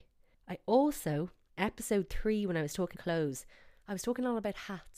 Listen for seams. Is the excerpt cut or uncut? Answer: cut